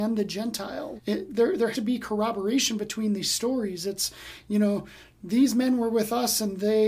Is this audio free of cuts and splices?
no; 2 cuts; at 1.0 s, 1.7 s

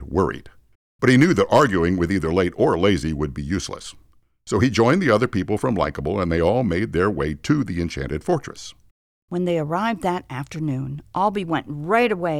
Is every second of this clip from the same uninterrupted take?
yes; 0 cuts

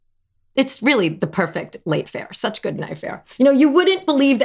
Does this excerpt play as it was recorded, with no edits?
no; 3 cuts; at 2.0 s, 2.8 s, 3.3 s

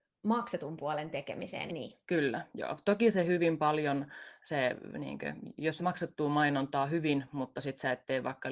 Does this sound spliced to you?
yes; 3 cuts; at 1.7 s, 2.0 s, 5.8 s

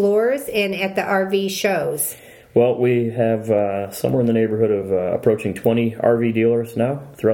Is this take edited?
no; 0 cuts

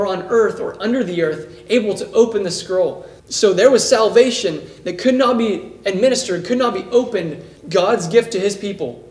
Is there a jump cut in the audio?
yes; 2 cuts; at 3.2 s, 7.6 s

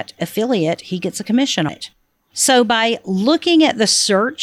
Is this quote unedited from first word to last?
no; 1 cut; at 1.7 s

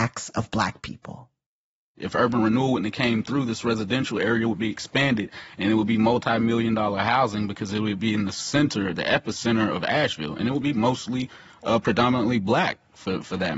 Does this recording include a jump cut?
no; 0 cuts

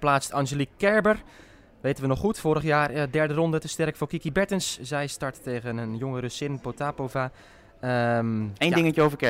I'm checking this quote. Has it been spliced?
no; 0 cuts

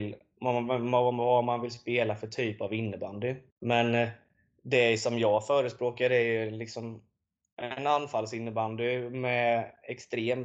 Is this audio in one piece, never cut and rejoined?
no; 1 cut; at 3.5 s

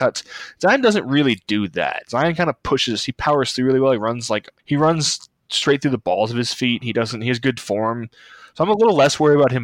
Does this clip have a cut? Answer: yes; 1 cut; at 4.6 s

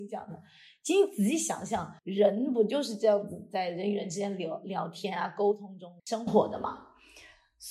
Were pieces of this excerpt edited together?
yes; 2 cuts; at 2.0 s, 6.0 s

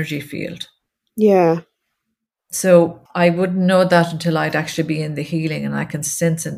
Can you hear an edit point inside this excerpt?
yes; 1 cut; at 3.1 s

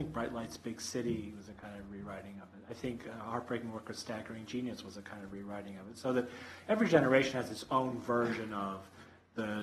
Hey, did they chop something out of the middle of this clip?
no; 0 cuts

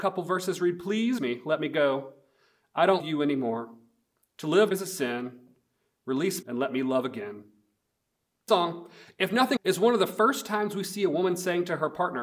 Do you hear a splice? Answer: yes; 6 cuts; at 1.2 s, 3.0 s, 4.7 s, 6.4 s, 8.5 s, 9.6 s

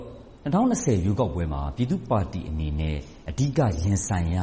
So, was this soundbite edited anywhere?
no; 0 cuts

